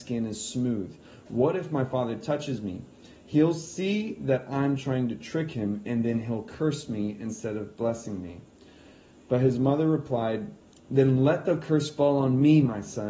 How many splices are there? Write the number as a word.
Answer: zero